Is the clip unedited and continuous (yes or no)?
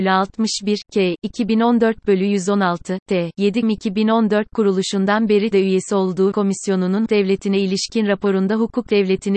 no